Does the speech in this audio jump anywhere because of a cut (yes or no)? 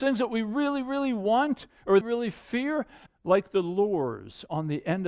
yes